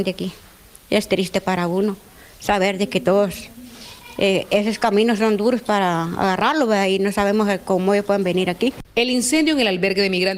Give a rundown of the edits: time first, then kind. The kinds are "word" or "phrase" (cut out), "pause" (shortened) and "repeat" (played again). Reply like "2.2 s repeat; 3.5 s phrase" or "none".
none